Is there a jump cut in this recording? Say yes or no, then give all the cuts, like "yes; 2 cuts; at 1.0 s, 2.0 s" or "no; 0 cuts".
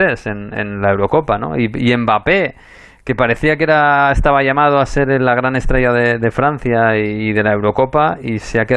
no; 0 cuts